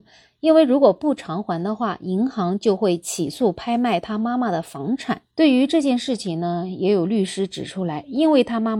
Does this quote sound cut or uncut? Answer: cut